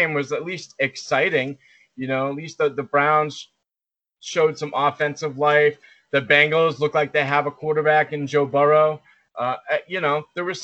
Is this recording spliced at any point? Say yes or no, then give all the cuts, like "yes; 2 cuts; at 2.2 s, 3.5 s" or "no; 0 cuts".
no; 0 cuts